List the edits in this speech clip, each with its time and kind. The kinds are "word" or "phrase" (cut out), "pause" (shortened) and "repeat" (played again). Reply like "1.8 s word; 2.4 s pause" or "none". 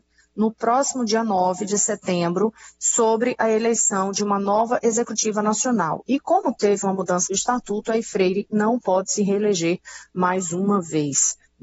7.3 s word